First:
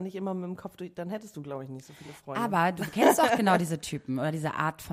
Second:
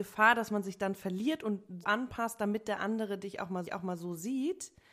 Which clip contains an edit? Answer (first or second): second